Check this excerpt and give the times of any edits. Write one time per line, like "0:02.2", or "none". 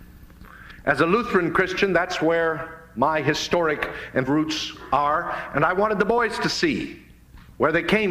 0:04.3